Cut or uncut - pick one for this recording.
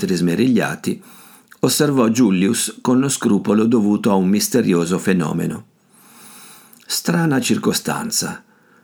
uncut